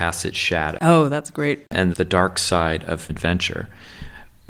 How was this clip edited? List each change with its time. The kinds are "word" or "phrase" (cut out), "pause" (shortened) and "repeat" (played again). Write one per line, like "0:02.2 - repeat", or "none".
0:01.9 - phrase
0:03.1 - word